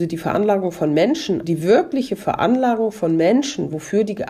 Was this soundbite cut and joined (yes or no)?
yes